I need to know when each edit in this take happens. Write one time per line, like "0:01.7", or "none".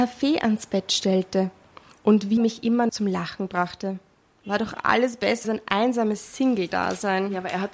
0:02.4
0:02.9
0:05.4